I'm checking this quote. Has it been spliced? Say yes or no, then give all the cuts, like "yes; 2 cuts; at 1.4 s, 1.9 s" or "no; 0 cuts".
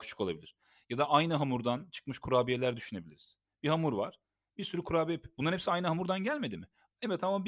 no; 0 cuts